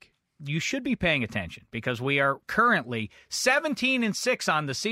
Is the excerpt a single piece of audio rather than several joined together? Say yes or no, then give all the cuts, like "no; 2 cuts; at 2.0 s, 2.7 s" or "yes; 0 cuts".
yes; 0 cuts